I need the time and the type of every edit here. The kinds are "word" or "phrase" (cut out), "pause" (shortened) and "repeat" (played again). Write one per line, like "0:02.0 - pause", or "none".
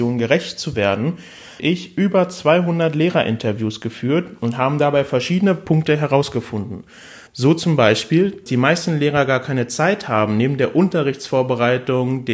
0:01.6 - phrase
0:07.3 - pause
0:08.5 - word